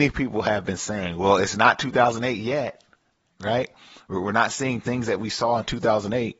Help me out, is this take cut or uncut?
uncut